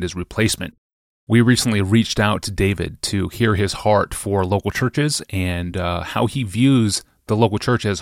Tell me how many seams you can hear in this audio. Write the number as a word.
zero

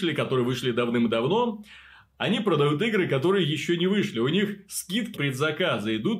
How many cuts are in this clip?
one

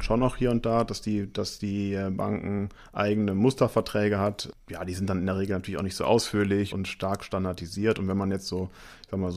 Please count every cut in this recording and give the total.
one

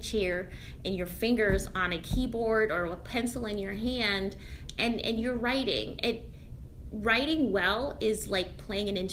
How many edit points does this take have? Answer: zero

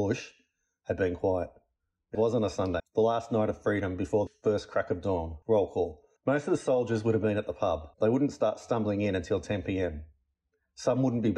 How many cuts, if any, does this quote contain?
six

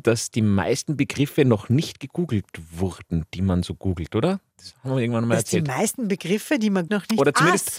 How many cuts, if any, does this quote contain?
one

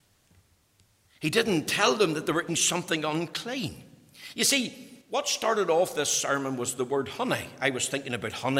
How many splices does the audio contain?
two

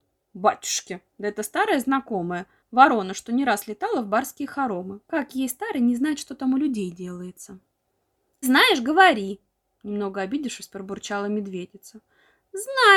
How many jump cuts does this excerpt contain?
three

